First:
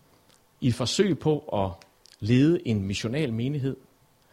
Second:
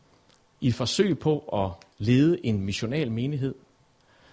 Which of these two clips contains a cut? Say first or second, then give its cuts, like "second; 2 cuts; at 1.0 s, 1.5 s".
second; 1 cut; at 1.9 s